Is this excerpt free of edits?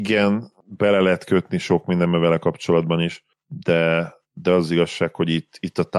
yes; 0 cuts

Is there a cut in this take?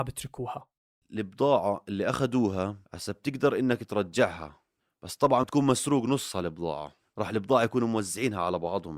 yes; 2 cuts; at 2.9 s, 5.4 s

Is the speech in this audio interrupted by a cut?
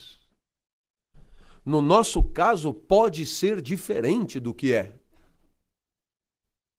no; 0 cuts

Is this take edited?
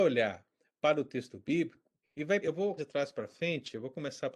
yes; 3 cuts; at 2.0 s, 2.4 s, 2.8 s

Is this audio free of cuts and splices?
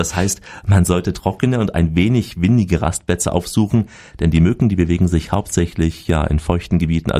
yes; 0 cuts

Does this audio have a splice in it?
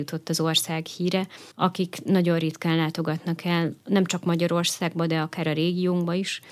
yes; 1 cut; at 1.5 s

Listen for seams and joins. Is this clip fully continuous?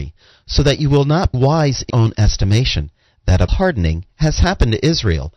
no; 3 cuts; at 1.3 s, 1.9 s, 3.5 s

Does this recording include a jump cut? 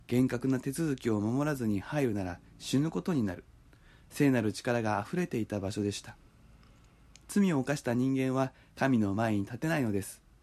no; 0 cuts

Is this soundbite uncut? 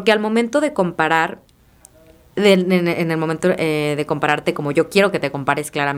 yes; 0 cuts

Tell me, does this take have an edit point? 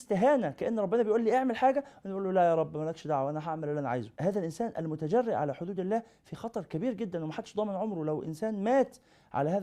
no; 0 cuts

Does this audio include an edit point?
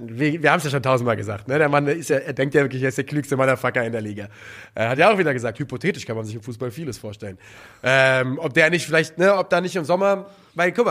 no; 0 cuts

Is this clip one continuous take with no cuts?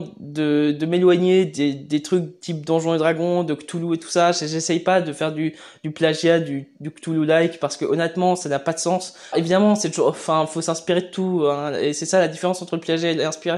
no; 1 cut; at 9.3 s

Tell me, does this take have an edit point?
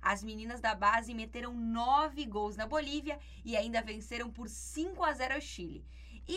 no; 0 cuts

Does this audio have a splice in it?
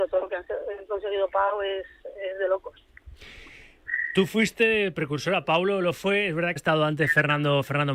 yes; 1 cut; at 6.6 s

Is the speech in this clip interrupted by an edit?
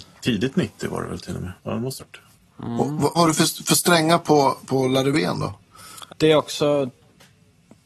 yes; 6 cuts; at 1.6 s, 2.0 s, 2.3 s, 3.1 s, 4.6 s, 6.1 s

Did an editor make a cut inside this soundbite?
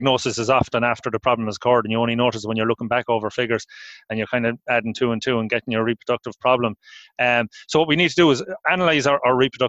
no; 0 cuts

